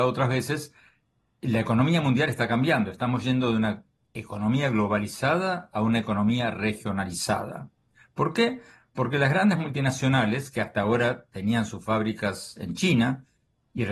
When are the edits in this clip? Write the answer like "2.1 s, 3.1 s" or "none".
none